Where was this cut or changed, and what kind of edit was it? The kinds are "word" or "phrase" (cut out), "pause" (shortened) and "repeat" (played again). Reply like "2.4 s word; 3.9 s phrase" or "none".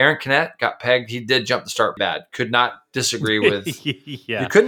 2.0 s word

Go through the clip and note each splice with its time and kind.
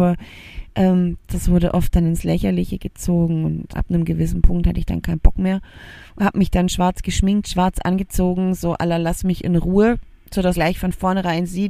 3.7 s word; 10.5 s word

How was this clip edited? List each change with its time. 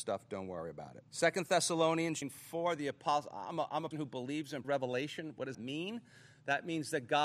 1.1 s pause; 2.2 s phrase; 3.9 s word; 4.6 s word; 5.5 s word

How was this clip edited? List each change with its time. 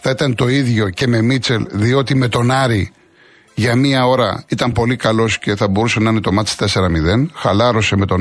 none

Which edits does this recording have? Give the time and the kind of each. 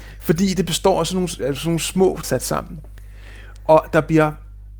1.4 s word; 2.2 s phrase

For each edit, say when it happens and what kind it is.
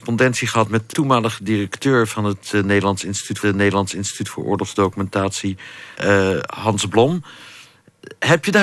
0.9 s word; 3.4 s repeat; 5.9 s pause

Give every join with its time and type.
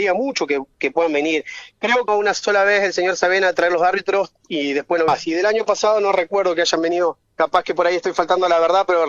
2.1 s phrase; 5.1 s phrase; 7.2 s pause

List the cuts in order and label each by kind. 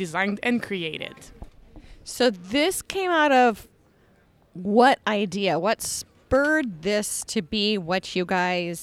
none

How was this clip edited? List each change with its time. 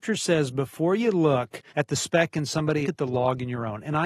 1.7 s pause; 2.8 s phrase

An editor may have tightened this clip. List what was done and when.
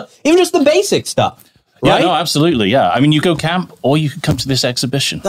3.2 s word

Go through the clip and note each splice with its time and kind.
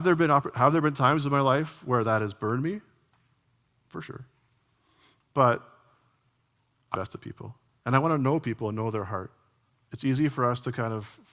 6.9 s phrase

